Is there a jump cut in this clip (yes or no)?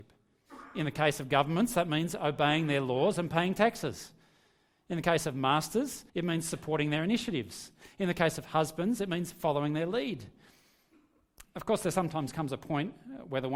yes